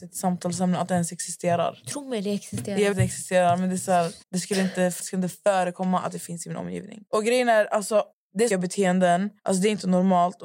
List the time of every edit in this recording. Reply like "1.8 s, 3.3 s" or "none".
2.9 s, 4.2 s, 5.0 s, 7.1 s, 8.1 s, 8.5 s, 9.4 s

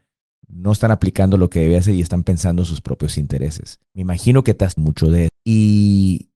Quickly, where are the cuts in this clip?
3.8 s, 4.8 s, 5.3 s

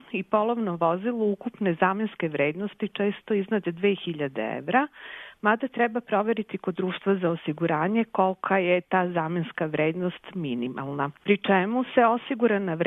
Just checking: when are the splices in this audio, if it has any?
none

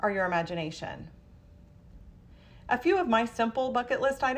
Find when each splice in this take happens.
none

